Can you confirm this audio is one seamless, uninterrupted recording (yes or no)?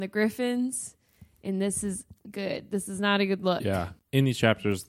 no